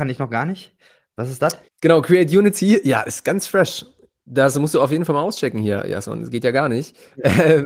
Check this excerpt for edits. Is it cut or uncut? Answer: cut